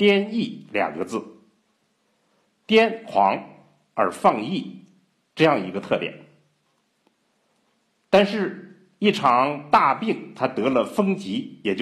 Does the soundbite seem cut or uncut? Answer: uncut